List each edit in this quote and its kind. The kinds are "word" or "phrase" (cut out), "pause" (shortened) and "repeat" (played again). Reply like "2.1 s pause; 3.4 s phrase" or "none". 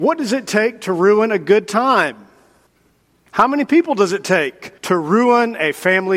2.7 s pause; 4.8 s pause